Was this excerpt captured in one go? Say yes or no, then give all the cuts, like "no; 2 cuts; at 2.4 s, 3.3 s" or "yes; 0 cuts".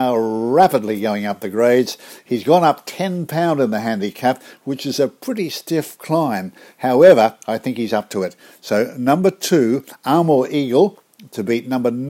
yes; 0 cuts